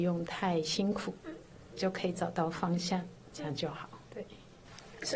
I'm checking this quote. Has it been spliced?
yes; 2 cuts; at 1.2 s, 4.0 s

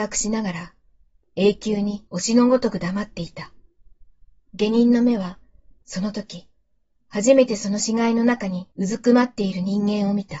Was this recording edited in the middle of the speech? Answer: yes; 2 cuts; at 2.1 s, 8.7 s

